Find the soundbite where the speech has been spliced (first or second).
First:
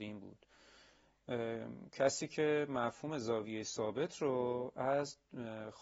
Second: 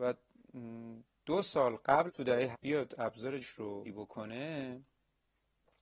second